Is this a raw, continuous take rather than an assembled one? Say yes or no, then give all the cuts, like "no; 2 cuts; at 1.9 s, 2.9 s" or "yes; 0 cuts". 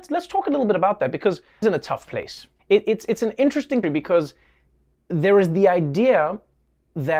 no; 3 cuts; at 1.6 s, 2.6 s, 3.8 s